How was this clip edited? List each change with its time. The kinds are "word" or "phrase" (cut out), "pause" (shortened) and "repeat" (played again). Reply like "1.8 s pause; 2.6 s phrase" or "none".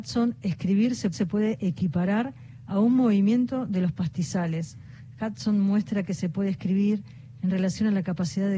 1.1 s repeat